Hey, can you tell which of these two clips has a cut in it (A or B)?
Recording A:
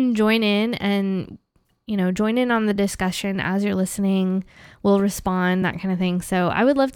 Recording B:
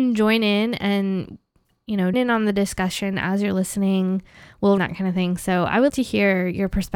B